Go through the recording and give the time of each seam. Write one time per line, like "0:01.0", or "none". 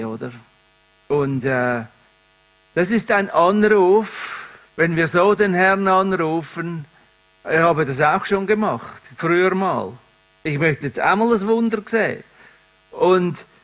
none

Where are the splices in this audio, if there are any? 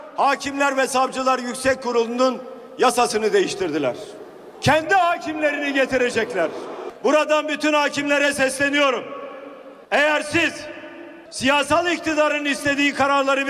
none

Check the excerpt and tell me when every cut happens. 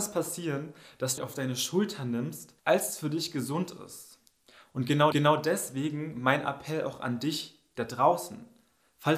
0:01.2
0:02.6
0:05.1

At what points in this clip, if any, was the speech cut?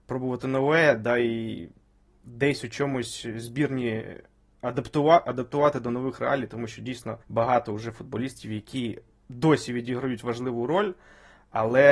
0:07.2

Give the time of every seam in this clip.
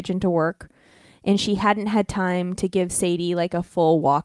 none

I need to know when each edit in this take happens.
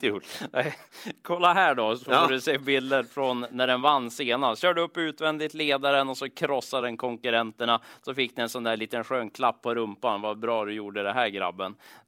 none

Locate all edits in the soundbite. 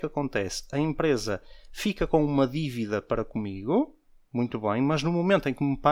none

